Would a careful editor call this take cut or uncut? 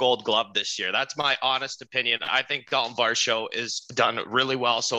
uncut